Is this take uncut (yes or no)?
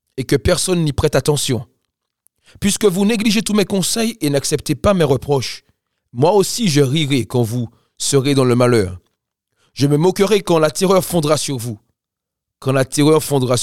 yes